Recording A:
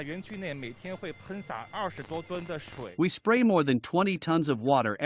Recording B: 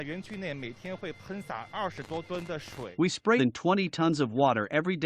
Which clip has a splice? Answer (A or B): B